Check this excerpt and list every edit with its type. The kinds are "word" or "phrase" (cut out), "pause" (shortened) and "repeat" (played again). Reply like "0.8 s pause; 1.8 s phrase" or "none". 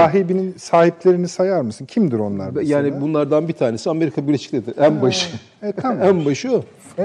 none